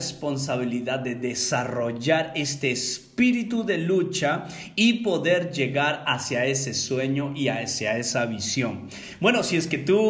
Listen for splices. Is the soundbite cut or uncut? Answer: uncut